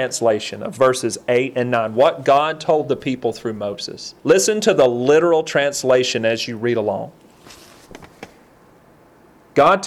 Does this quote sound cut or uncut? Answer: cut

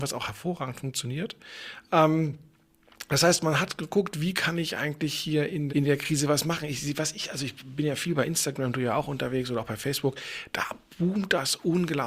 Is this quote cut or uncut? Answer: cut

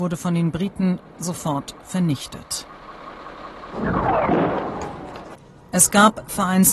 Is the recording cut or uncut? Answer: uncut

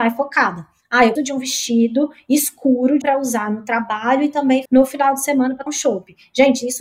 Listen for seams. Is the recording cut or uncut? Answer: cut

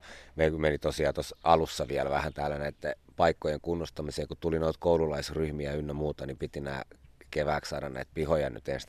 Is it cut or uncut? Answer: uncut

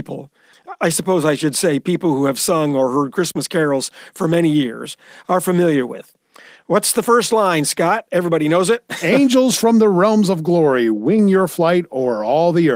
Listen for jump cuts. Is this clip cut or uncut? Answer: uncut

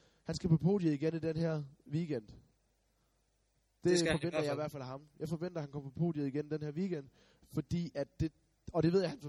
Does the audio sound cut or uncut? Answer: uncut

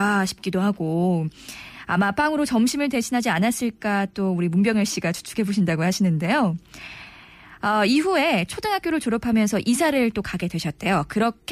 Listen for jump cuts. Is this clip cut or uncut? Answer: uncut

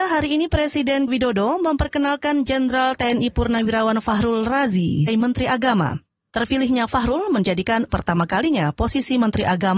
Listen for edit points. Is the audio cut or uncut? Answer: cut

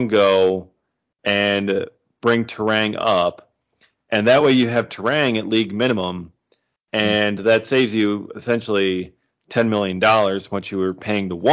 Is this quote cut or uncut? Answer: uncut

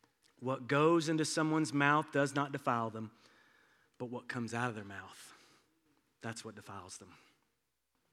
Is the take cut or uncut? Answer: uncut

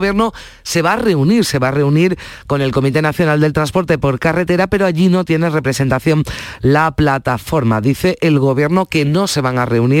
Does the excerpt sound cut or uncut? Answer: uncut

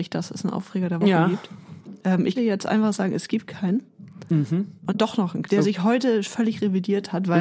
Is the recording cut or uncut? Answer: cut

